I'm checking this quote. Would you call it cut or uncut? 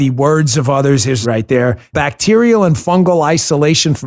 cut